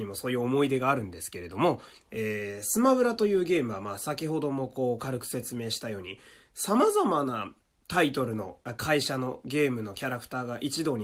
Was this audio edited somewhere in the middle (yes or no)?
no